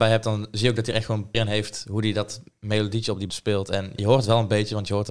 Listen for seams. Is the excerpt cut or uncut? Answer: cut